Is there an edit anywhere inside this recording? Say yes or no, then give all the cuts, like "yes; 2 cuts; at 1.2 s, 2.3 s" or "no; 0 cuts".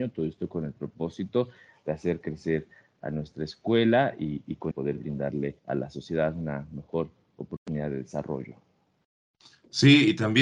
yes; 2 cuts; at 4.7 s, 5.6 s